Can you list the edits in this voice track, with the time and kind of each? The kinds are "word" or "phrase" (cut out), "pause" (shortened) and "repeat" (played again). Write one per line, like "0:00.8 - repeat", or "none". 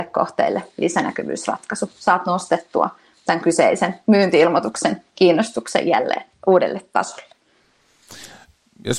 0:06.3 - word